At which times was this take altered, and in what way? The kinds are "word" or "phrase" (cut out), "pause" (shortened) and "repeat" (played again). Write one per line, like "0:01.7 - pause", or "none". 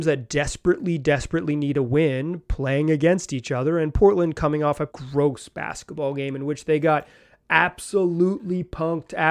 0:04.9 - word